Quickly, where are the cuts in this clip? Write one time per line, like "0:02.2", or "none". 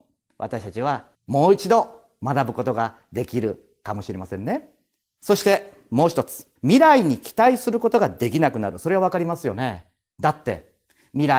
0:01.1
0:06.6